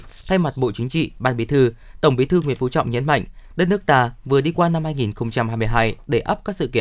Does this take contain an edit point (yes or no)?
no